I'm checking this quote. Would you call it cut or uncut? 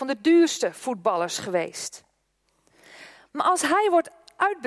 uncut